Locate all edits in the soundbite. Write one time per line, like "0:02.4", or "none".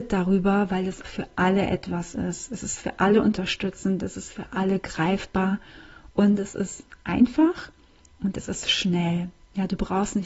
0:01.0